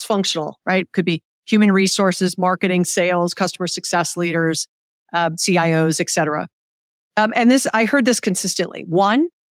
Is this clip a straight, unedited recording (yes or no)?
yes